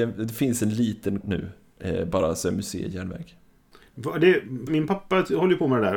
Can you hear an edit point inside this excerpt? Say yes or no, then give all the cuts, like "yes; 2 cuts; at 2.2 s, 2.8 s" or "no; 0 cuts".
yes; 2 cuts; at 1.2 s, 4.7 s